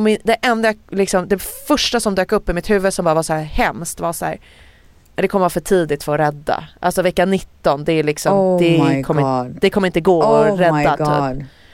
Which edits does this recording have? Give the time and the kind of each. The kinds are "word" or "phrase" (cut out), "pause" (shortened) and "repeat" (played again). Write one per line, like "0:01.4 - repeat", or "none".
none